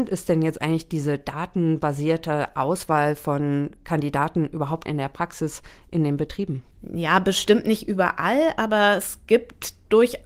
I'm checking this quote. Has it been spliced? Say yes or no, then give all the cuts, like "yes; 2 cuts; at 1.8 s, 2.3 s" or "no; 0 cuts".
yes; 2 cuts; at 4.9 s, 6.7 s